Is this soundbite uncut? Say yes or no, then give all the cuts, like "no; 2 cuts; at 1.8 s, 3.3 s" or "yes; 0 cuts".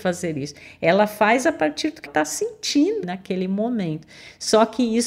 no; 3 cuts; at 1.4 s, 2.1 s, 3.0 s